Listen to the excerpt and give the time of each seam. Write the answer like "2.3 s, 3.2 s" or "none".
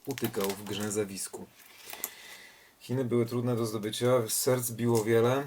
none